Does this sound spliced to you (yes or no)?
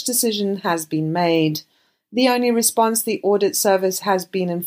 no